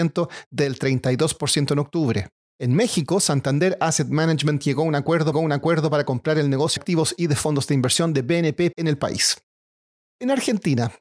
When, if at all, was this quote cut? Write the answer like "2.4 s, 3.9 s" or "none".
2.3 s, 5.3 s, 6.8 s, 8.7 s

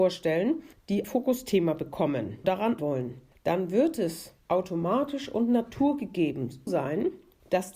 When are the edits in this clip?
1.0 s, 2.4 s, 2.8 s, 6.7 s

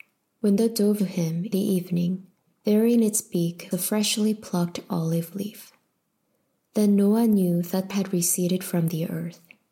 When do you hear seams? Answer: 1.0 s, 1.5 s, 3.7 s, 7.9 s

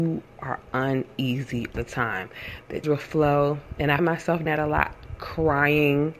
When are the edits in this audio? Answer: 1.7 s, 2.8 s, 4.0 s, 4.5 s

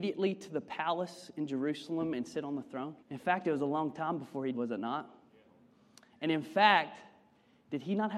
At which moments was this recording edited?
3.0 s, 4.5 s

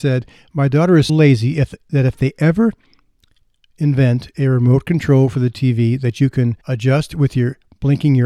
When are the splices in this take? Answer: 1.1 s, 6.6 s

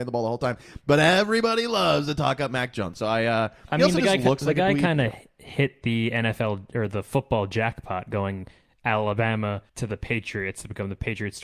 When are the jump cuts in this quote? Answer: 9.7 s

